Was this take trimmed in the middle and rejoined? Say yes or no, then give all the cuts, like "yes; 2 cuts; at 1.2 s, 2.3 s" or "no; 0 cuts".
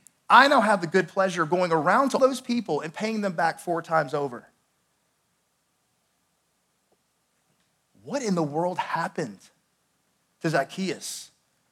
yes; 1 cut; at 2.2 s